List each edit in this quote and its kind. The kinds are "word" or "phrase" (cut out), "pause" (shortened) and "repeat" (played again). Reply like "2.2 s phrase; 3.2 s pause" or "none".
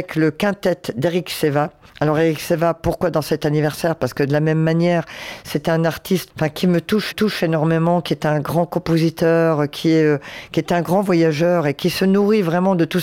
1.9 s pause; 6.3 s word; 7.1 s repeat